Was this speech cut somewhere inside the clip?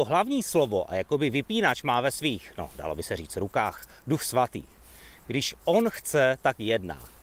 no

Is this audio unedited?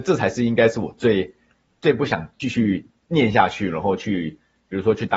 no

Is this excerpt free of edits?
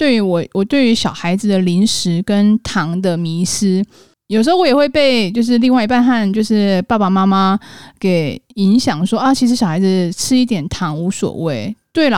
yes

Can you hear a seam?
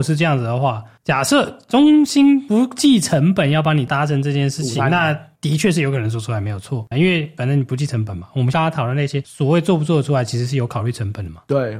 yes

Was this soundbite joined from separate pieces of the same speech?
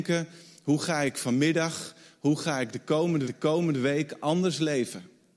yes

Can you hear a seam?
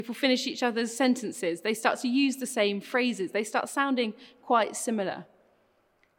no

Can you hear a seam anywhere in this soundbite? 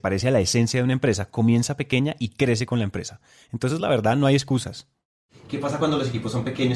no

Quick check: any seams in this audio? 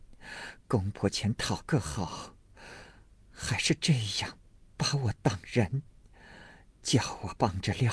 no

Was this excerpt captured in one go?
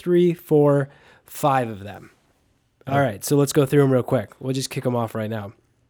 yes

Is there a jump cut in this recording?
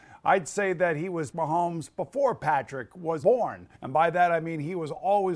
yes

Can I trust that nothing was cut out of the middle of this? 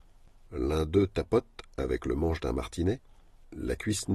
yes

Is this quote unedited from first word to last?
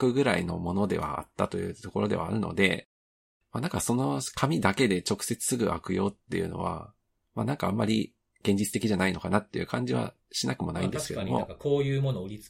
yes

